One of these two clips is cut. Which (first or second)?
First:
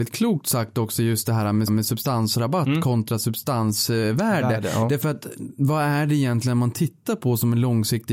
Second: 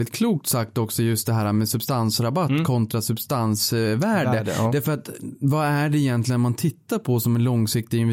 first